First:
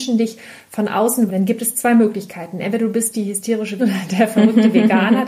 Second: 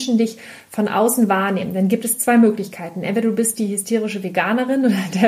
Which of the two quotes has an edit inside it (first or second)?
first